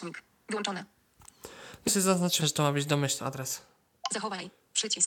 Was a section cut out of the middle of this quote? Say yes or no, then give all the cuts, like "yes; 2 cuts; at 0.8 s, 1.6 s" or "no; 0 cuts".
yes; 3 cuts; at 1.9 s, 2.4 s, 3.2 s